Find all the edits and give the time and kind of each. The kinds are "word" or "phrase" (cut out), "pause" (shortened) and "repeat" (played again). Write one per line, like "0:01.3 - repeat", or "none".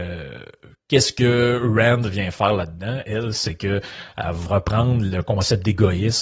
0:04.5 - word